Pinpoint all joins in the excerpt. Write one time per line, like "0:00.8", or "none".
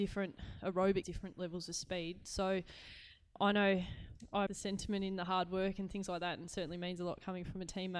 0:01.0
0:04.5